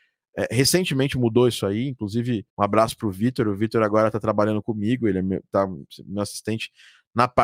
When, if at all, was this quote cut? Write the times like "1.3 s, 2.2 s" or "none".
2.5 s